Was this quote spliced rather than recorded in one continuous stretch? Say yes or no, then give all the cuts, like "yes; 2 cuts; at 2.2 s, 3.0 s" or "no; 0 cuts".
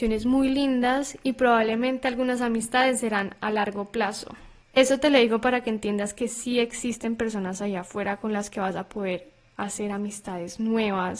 no; 0 cuts